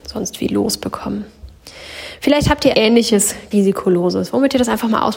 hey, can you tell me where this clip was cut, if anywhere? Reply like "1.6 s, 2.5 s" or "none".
2.7 s, 3.5 s